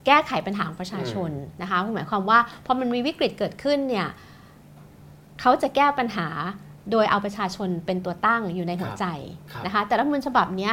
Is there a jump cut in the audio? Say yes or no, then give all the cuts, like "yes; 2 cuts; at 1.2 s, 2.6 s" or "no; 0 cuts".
no; 0 cuts